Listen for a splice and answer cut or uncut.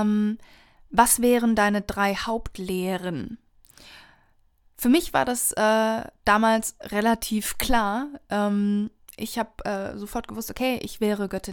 uncut